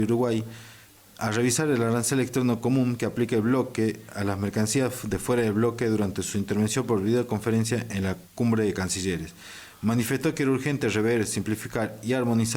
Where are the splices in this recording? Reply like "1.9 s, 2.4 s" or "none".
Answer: 8.3 s